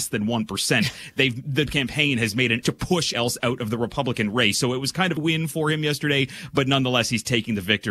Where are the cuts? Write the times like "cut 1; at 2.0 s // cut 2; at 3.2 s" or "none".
cut 1; at 1.7 s // cut 2; at 2.6 s // cut 3; at 3.1 s // cut 4; at 5.2 s